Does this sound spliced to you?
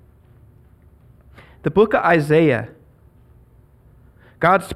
no; 0 cuts

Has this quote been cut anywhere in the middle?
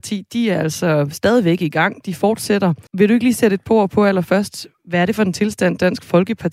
yes; 1 cut; at 2.9 s

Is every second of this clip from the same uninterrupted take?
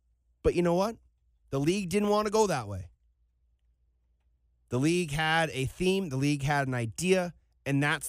yes; 0 cuts

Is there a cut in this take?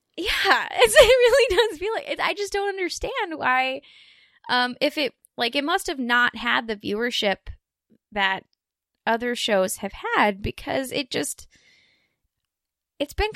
no; 0 cuts

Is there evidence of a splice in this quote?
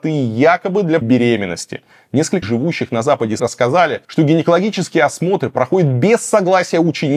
yes; 4 cuts; at 1.0 s, 2.4 s, 3.4 s, 4.0 s

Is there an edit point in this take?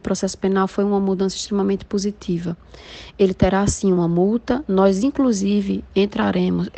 no; 0 cuts

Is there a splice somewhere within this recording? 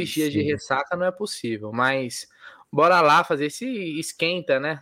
no; 0 cuts

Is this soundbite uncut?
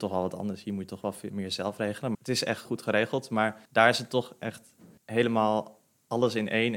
no; 5 cuts; at 1.3 s, 2.1 s, 2.6 s, 3.7 s, 5.0 s

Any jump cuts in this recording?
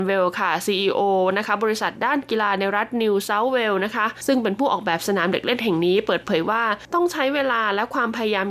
no; 0 cuts

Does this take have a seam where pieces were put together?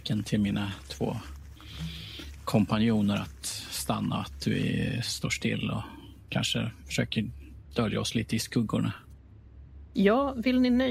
no; 0 cuts

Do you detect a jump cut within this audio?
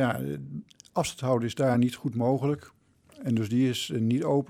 no; 0 cuts

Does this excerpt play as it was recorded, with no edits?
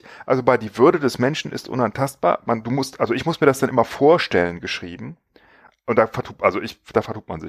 yes; 0 cuts

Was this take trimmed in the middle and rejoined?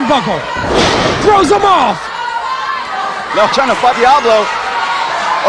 yes; 2 cuts; at 3.5 s, 3.9 s

